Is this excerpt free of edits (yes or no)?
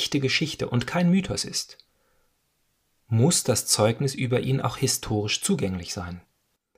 yes